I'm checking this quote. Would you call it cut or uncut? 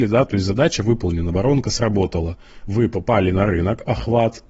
uncut